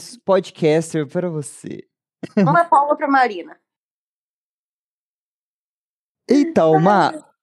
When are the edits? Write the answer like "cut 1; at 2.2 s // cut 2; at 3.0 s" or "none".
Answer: none